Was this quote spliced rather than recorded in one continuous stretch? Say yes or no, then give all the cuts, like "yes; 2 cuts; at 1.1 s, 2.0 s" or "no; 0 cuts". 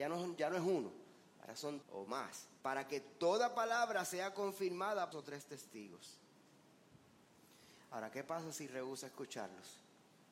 yes; 3 cuts; at 1.8 s, 2.6 s, 5.1 s